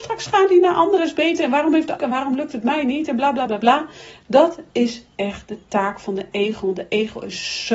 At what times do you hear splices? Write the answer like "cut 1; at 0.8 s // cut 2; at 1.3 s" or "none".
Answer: cut 1; at 1.0 s // cut 2; at 2.0 s // cut 3; at 3.5 s